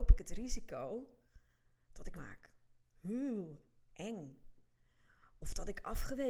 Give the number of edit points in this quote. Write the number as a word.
one